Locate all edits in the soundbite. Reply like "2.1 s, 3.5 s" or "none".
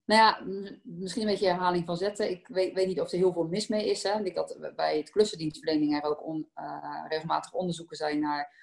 4.3 s